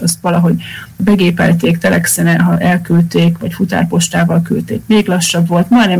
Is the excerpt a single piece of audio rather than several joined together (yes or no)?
yes